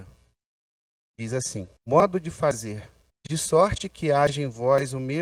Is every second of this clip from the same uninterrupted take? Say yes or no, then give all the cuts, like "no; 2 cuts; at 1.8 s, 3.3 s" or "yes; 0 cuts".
no; 2 cuts; at 1.8 s, 3.1 s